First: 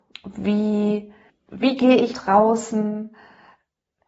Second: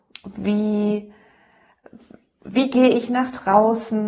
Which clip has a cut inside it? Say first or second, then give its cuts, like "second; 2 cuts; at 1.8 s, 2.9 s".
first; 2 cuts; at 1.3 s, 2.1 s